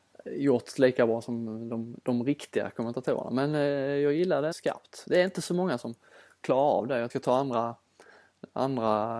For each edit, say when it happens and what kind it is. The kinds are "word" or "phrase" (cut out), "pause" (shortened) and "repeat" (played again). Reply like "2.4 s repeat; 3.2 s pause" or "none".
4.5 s phrase; 5.8 s phrase; 7.1 s phrase